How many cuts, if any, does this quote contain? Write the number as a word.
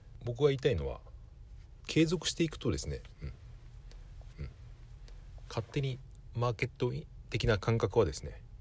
one